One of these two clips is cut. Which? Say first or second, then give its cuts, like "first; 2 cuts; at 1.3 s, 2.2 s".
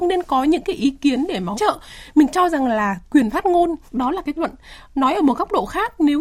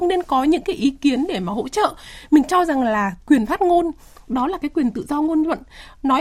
first; 3 cuts; at 1.5 s, 3.9 s, 4.4 s